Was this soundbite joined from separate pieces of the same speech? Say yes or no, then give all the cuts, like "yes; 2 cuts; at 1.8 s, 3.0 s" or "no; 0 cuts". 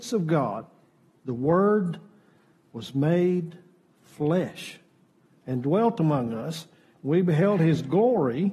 no; 0 cuts